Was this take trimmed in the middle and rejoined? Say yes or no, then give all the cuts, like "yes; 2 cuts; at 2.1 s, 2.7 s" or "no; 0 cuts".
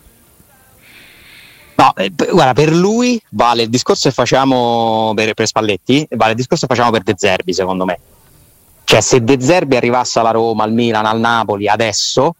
no; 0 cuts